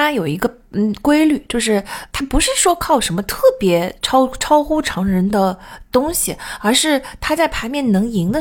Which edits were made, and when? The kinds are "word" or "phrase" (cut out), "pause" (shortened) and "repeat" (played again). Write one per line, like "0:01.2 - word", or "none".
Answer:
0:02.1 - word